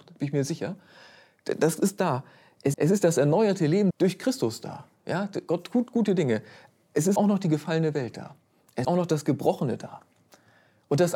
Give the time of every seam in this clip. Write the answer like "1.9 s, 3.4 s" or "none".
2.7 s, 3.9 s, 7.2 s, 8.8 s